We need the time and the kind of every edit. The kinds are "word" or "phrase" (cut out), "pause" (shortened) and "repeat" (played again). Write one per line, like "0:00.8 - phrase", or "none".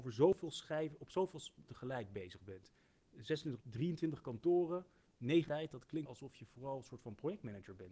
0:01.7 - word
0:03.6 - word
0:05.5 - word
0:06.0 - word